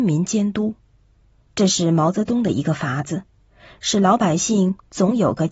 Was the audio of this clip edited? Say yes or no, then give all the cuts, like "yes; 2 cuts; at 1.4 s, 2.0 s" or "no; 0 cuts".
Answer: no; 0 cuts